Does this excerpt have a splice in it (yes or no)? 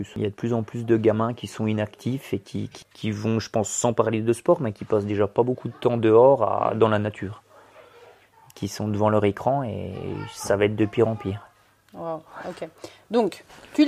no